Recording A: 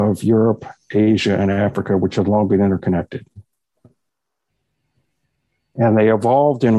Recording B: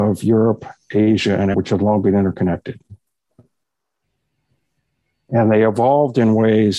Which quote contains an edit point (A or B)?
B